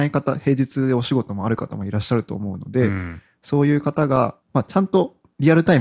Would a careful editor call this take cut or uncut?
cut